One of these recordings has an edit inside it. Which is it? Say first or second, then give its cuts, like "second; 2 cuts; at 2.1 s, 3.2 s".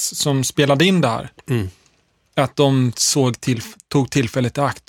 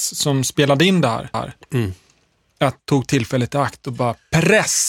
second; 2 cuts; at 1.3 s, 2.8 s